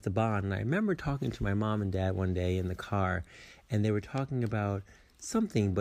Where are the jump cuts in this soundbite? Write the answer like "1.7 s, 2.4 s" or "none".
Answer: none